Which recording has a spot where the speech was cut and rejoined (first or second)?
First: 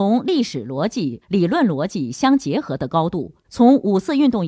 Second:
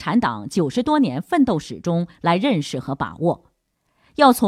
first